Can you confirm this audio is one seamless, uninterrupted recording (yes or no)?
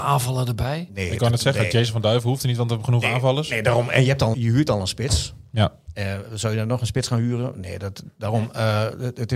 no